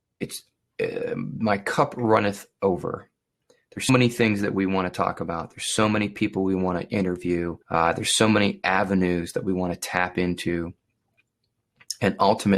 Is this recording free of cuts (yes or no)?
no